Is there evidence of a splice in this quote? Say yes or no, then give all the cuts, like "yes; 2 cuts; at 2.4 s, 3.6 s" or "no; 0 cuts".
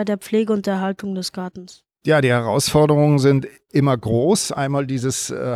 no; 0 cuts